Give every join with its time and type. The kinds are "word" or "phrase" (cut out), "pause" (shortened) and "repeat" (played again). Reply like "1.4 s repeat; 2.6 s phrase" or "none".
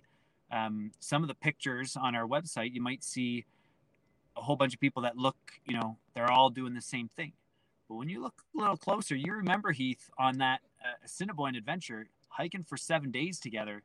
none

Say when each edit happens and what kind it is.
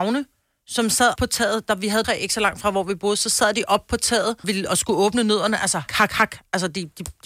1.2 s word; 2.0 s word; 4.4 s word; 5.9 s word

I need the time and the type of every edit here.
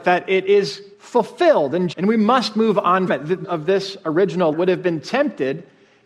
0.9 s pause; 1.9 s word; 3.1 s word; 3.4 s word; 4.5 s word

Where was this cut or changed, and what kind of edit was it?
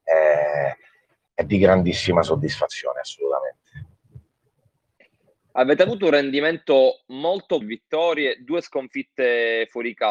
7.6 s phrase

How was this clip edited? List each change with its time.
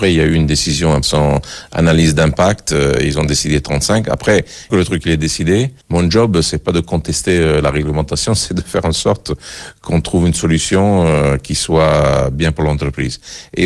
1.0 s phrase; 4.7 s phrase; 5.8 s pause

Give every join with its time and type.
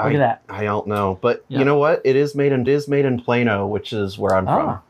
2.7 s repeat

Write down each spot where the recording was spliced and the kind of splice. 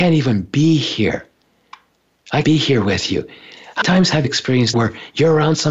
2.4 s word; 3.8 s word; 4.2 s word; 4.7 s word

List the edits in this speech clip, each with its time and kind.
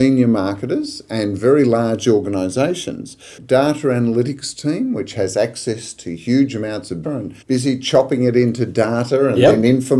3.4 s phrase; 7.0 s phrase; 7.4 s pause

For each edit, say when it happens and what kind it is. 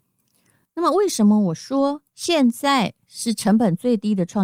2.1 s pause

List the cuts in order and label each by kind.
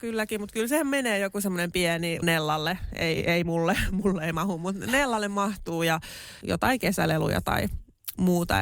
2.2 s phrase; 6.4 s word

